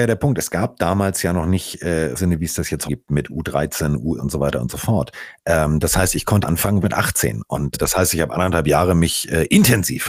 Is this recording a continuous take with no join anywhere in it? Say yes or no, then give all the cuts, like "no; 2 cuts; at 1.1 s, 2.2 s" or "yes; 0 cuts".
no; 6 cuts; at 2.2 s, 2.9 s, 4.2 s, 6.4 s, 6.8 s, 7.7 s